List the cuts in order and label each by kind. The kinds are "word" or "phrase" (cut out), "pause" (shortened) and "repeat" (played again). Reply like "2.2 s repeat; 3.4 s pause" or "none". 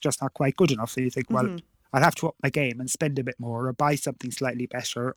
none